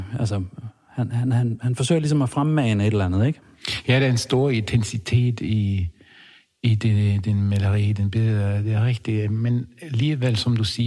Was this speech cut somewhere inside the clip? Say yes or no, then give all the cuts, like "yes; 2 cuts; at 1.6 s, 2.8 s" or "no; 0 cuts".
no; 0 cuts